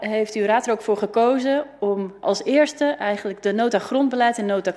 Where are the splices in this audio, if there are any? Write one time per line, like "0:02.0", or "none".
0:02.2